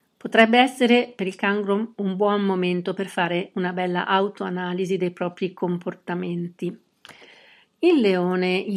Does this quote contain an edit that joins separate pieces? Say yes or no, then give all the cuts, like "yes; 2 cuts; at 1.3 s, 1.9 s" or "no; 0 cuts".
no; 0 cuts